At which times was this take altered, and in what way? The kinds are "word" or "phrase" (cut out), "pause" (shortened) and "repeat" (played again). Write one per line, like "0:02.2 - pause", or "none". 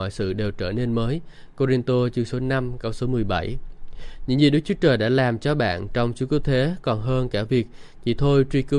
none